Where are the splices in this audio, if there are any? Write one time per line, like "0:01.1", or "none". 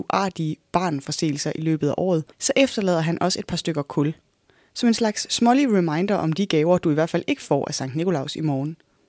0:02.3